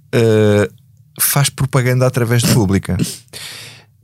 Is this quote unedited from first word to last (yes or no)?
no